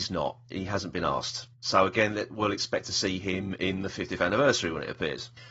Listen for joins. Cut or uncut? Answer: cut